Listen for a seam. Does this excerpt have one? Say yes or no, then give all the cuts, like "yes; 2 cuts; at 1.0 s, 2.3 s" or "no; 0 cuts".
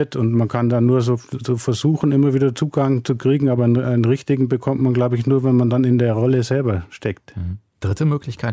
no; 0 cuts